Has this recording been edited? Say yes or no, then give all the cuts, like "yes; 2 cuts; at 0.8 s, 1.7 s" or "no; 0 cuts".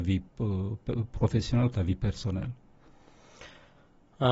yes; 1 cut; at 1.7 s